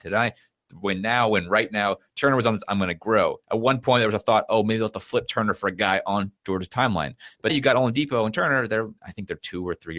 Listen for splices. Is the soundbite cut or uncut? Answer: cut